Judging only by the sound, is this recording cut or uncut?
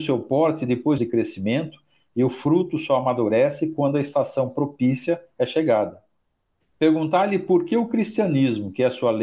cut